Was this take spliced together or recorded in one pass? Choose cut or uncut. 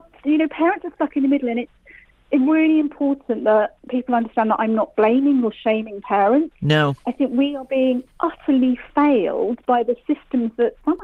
uncut